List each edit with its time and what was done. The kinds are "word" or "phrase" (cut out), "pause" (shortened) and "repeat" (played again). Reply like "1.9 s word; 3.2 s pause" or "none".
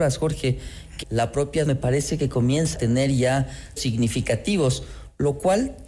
1.0 s word; 1.7 s word; 2.7 s word; 3.8 s word

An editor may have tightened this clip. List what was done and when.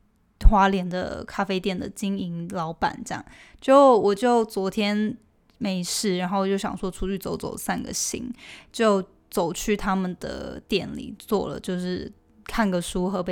none

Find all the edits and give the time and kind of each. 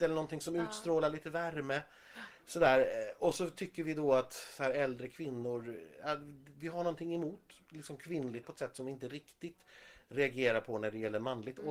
8.4 s word

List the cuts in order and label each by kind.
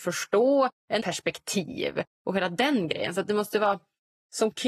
1.0 s word

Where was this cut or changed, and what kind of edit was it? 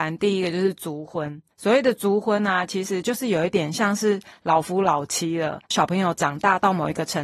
1.5 s pause

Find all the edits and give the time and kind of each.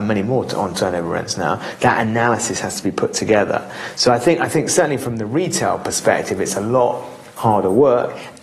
none

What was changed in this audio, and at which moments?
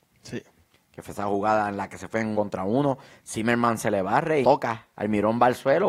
2.3 s word; 4.4 s phrase; 4.9 s pause

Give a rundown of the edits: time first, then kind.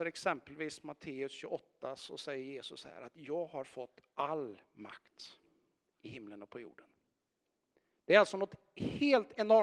none

